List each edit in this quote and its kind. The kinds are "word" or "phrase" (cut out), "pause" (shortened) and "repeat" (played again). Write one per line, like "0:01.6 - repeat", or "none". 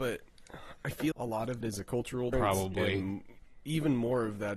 0:01.1 - word
0:01.6 - word
0:02.3 - word